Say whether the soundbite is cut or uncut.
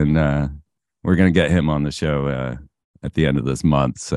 uncut